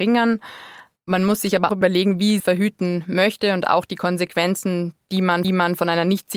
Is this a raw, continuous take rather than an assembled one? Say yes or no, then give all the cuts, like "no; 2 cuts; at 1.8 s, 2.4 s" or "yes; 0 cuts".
no; 4 cuts; at 1.7 s, 2.4 s, 5.0 s, 5.4 s